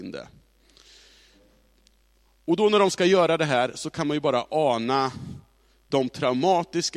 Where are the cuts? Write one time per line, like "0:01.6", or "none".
none

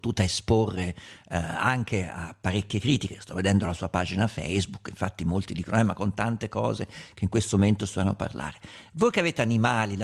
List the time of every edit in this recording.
none

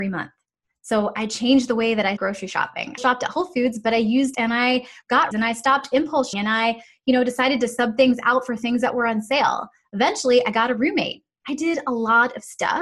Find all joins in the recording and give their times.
0:02.2
0:03.0
0:04.3
0:05.3
0:06.3

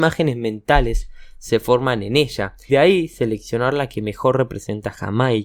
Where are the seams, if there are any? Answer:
0:02.7

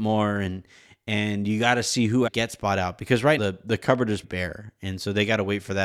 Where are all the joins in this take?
0:02.3
0:03.4
0:04.2

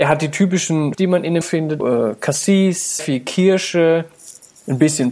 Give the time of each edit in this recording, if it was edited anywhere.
0:00.9
0:01.4
0:01.8
0:03.0

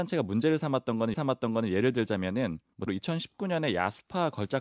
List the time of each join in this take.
0:01.1
0:02.9

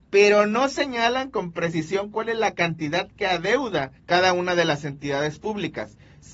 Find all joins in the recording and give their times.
0:04.0

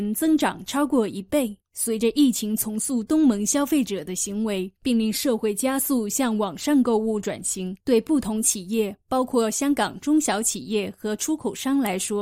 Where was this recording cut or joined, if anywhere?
0:01.6
0:04.8
0:07.8

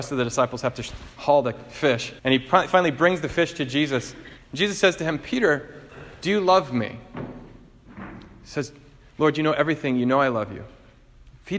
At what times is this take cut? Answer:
0:02.2
0:04.4

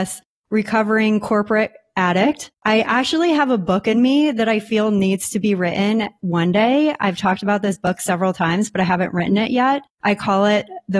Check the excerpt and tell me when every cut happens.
0:02.6
0:09.9

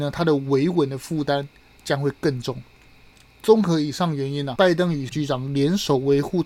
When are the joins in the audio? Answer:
0:04.6
0:05.1

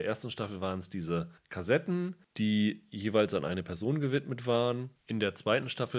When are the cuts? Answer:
none

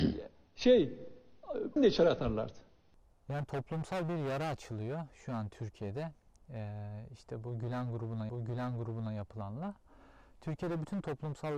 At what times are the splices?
0:01.8
0:08.3

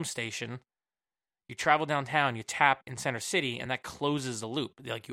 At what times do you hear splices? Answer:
none

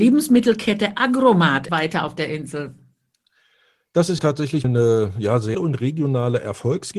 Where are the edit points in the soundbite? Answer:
0:01.7
0:04.2
0:04.6
0:05.5

